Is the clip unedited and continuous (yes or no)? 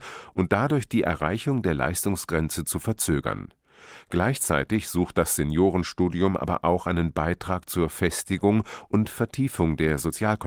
yes